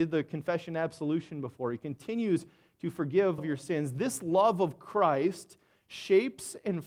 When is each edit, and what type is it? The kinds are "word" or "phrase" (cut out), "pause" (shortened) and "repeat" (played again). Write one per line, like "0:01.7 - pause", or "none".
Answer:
0:03.4 - word